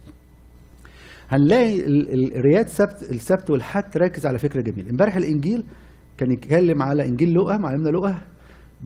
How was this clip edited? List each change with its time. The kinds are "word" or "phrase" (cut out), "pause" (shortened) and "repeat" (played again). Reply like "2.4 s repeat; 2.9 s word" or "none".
none